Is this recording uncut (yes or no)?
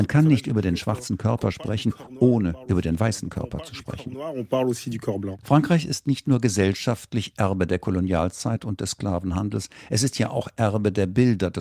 yes